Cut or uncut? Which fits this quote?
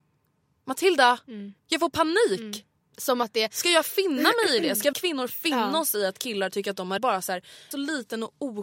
cut